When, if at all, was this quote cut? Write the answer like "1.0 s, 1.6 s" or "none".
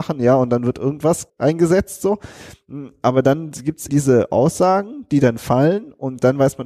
1.3 s, 3.9 s